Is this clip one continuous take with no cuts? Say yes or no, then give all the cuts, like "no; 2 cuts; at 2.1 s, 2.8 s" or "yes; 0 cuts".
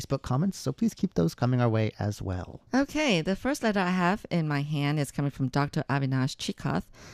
no; 1 cut; at 2.7 s